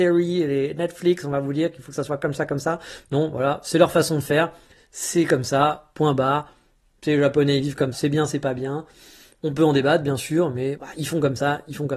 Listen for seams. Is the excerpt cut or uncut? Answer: cut